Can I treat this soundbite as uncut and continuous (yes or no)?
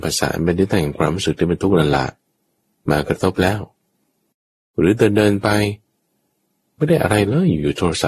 yes